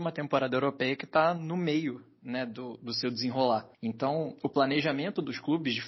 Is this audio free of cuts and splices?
no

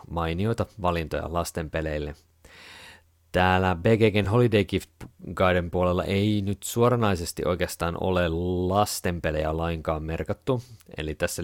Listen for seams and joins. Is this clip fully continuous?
yes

